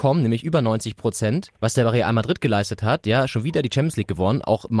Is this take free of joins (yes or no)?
no